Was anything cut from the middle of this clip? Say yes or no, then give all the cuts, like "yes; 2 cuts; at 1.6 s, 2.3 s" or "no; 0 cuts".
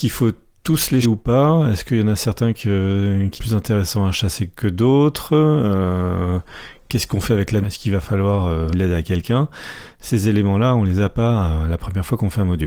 yes; 4 cuts; at 1.0 s, 3.4 s, 7.6 s, 8.7 s